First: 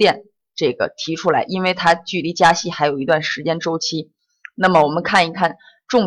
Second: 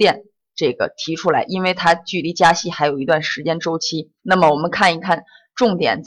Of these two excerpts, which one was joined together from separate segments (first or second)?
second